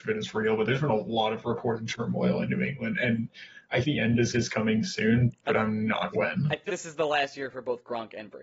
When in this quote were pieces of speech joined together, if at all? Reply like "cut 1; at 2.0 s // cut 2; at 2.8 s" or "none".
cut 1; at 3.8 s // cut 2; at 4.3 s // cut 3; at 6.1 s // cut 4; at 6.7 s